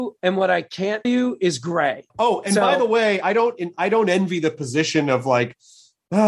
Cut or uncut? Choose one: cut